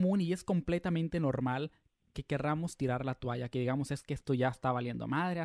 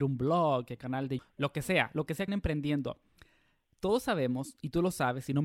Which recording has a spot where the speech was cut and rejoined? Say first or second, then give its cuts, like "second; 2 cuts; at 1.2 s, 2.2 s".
second; 2 cuts; at 1.2 s, 2.3 s